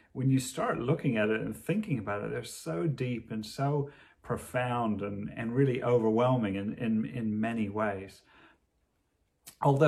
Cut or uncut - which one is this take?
uncut